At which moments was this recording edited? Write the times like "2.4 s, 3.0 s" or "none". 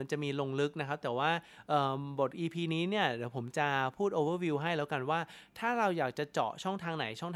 none